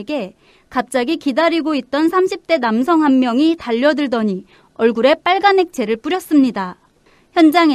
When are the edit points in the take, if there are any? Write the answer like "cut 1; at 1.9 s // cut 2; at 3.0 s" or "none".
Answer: none

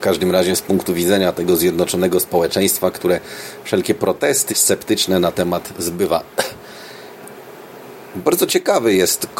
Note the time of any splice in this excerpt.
cut 1; at 4.5 s // cut 2; at 5.3 s

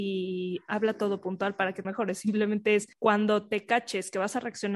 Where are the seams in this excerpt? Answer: cut 1; at 1.8 s // cut 2; at 2.9 s

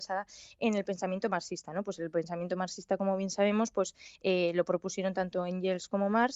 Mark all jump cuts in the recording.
none

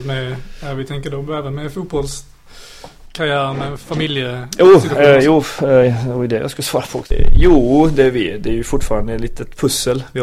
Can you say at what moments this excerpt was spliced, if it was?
none

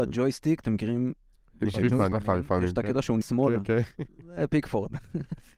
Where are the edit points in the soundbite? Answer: cut 1; at 2.1 s // cut 2; at 3.2 s

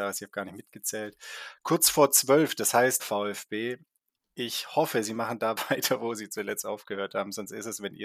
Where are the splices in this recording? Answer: cut 1; at 3.0 s

